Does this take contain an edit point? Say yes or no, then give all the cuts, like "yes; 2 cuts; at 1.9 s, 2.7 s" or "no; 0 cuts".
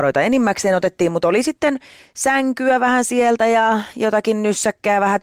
no; 0 cuts